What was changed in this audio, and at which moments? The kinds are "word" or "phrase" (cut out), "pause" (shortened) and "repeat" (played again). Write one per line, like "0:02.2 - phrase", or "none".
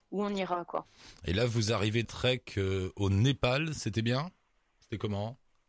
0:02.0 - word